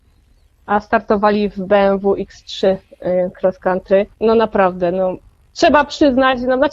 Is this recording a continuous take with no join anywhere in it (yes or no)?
no